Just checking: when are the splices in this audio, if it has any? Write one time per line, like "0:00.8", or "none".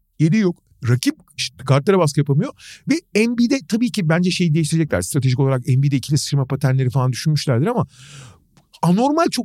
none